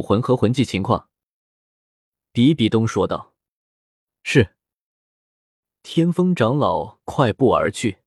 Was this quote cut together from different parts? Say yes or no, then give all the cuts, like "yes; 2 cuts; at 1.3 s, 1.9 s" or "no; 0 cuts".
no; 0 cuts